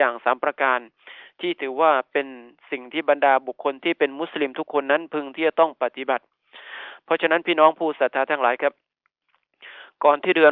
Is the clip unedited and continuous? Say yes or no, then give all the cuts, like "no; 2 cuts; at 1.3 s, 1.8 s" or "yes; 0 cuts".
yes; 0 cuts